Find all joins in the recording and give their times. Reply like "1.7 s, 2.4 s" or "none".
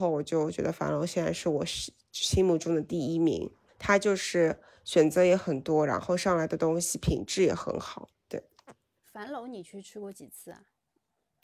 3.7 s